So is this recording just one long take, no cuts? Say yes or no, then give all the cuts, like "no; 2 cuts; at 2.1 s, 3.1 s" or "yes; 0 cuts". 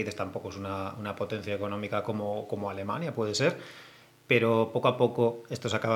yes; 0 cuts